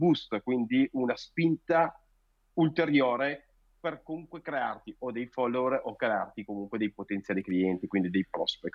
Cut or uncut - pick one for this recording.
cut